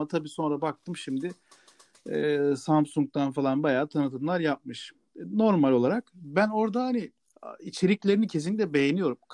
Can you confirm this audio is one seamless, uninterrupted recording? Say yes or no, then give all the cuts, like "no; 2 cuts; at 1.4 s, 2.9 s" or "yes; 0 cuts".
yes; 0 cuts